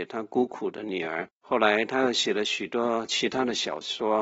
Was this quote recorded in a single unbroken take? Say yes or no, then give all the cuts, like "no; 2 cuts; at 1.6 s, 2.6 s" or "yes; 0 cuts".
no; 1 cut; at 1.4 s